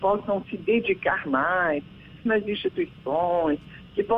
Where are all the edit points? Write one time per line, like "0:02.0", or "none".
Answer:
0:02.3